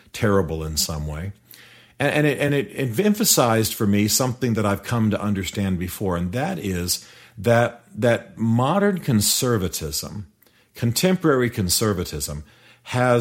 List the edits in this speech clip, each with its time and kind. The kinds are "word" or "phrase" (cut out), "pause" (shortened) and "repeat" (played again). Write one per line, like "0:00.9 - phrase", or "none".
none